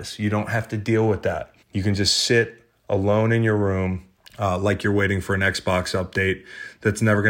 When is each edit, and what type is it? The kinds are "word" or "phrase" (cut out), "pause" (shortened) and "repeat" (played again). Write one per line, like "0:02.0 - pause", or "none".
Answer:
0:01.6 - pause
0:04.2 - pause